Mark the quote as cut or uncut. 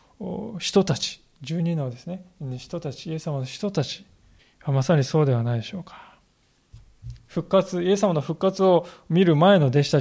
cut